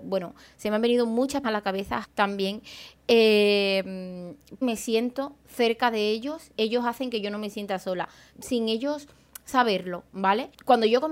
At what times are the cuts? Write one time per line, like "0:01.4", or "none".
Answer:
0:01.4
0:02.0
0:04.6
0:06.6
0:08.3